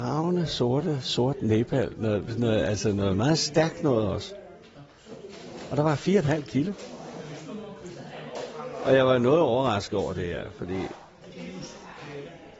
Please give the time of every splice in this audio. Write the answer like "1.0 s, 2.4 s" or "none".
none